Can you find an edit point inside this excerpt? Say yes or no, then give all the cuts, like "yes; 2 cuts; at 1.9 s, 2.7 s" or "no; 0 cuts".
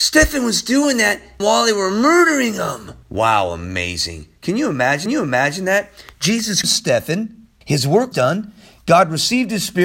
yes; 6 cuts; at 1.4 s, 3.0 s, 5.1 s, 6.6 s, 7.6 s, 8.1 s